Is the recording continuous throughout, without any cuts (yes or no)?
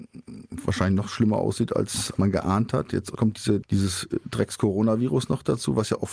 no